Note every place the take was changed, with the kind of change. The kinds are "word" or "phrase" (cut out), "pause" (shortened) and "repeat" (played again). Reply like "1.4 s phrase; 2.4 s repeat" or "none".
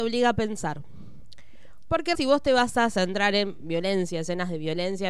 2.1 s word